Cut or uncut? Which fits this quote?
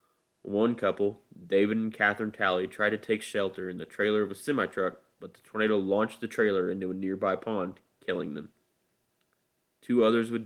uncut